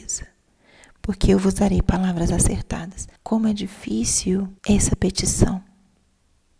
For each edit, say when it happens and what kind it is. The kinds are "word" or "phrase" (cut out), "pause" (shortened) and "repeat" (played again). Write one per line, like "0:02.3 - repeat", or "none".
0:03.2 - pause
0:04.6 - pause